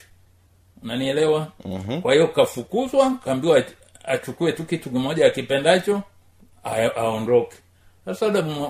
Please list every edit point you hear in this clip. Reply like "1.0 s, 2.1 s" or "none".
none